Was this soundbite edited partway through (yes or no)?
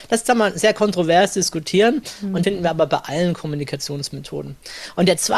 yes